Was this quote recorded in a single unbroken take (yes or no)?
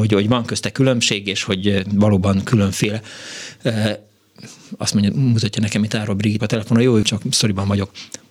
no